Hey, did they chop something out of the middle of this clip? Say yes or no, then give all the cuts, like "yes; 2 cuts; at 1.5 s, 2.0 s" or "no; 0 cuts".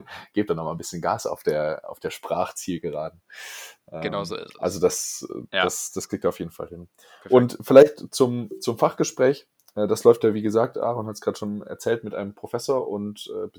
no; 0 cuts